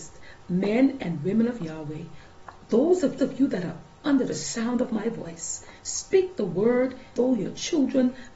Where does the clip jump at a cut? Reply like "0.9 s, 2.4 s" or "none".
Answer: 3.2 s, 7.2 s